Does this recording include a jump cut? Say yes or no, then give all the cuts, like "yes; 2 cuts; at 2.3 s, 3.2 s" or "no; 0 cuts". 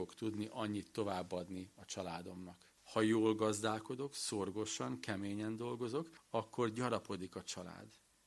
yes; 2 cuts; at 2.8 s, 6.2 s